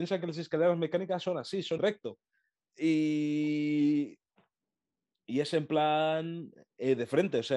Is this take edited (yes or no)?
yes